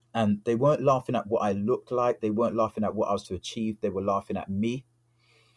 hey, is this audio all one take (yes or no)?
no